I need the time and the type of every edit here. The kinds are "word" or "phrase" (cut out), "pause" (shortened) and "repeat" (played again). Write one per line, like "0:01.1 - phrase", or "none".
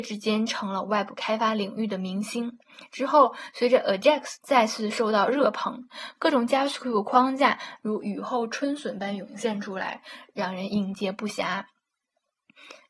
0:04.4 - phrase

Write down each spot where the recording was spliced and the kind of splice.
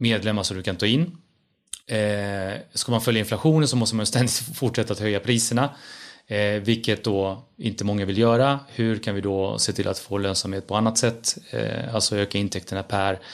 0:01.8 - pause

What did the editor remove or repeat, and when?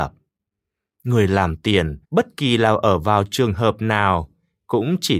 0:02.0 - pause

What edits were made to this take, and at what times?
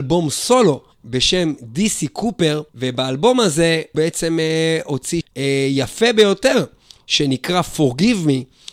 0:00.9 - pause
0:02.7 - pause
0:03.9 - word
0:05.2 - word

